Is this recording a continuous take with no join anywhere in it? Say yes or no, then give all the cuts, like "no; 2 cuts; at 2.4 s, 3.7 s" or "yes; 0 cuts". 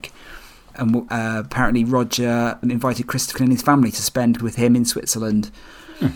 no; 4 cuts; at 1.1 s, 2.6 s, 3.3 s, 4.4 s